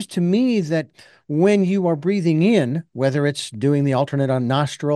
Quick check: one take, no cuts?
yes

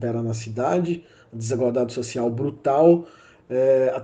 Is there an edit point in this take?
no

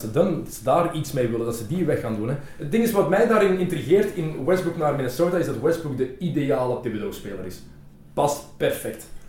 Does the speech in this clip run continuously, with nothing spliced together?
yes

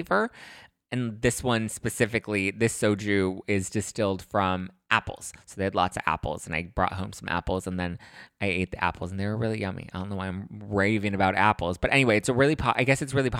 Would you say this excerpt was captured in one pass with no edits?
yes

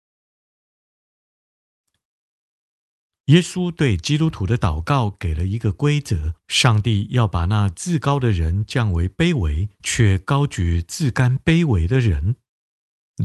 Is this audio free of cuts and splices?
no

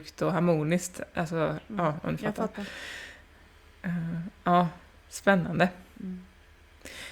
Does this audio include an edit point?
no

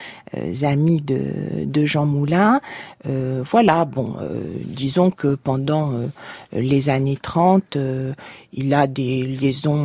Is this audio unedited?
yes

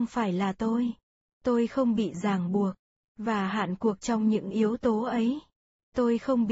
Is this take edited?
no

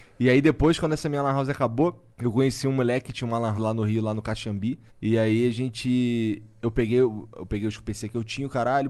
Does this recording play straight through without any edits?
no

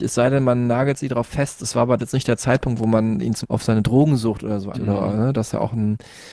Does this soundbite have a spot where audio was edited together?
yes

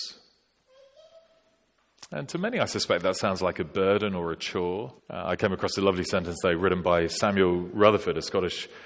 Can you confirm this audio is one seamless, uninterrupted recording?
no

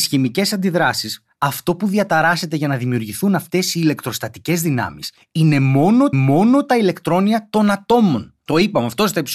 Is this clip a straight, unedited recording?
no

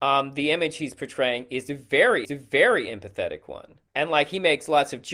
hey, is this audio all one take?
no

